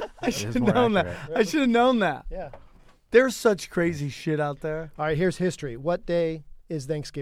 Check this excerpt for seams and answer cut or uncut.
uncut